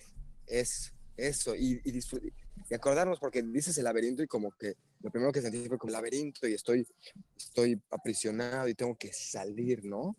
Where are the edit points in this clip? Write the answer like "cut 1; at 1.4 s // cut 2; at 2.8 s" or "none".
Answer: cut 1; at 5.9 s